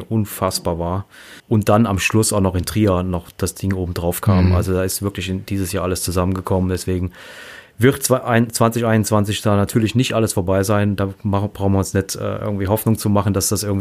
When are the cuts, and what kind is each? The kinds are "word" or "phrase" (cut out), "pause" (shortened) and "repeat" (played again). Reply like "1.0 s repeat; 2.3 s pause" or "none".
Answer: 1.4 s pause